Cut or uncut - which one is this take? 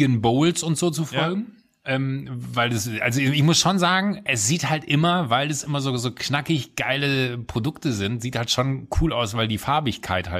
uncut